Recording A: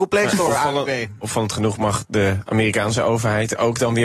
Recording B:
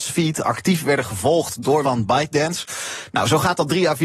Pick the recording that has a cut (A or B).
B